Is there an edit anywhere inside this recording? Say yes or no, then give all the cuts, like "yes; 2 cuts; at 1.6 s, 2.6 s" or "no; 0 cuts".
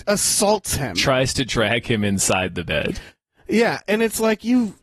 no; 0 cuts